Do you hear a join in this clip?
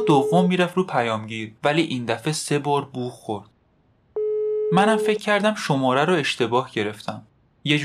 yes; 1 cut; at 1.6 s

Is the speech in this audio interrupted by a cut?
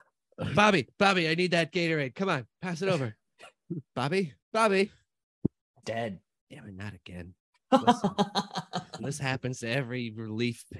yes; 4 cuts; at 4.4 s, 5.8 s, 7.4 s, 9.0 s

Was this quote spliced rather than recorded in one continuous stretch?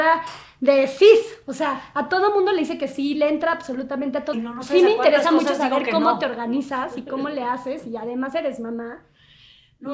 yes; 1 cut; at 4.3 s

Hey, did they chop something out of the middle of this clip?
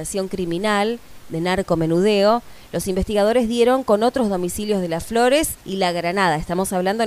yes; 1 cut; at 5.6 s

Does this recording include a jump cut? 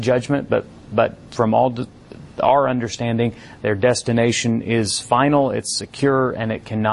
no; 0 cuts

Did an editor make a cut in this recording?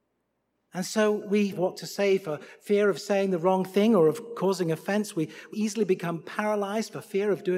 yes; 2 cuts; at 1.5 s, 5.5 s

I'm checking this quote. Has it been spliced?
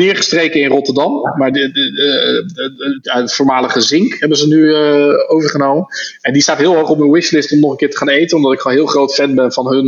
no; 0 cuts

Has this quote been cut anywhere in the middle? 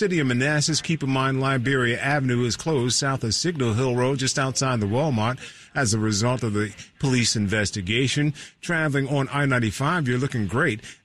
no; 0 cuts

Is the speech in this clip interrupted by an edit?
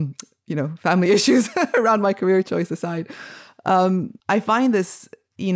yes; 1 cut; at 4.2 s

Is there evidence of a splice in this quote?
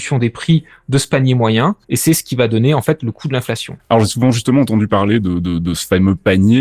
yes; 1 cut; at 1.8 s

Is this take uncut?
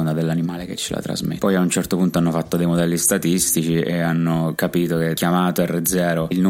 yes; 0 cuts

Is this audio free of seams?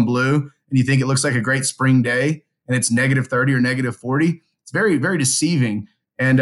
yes; 0 cuts

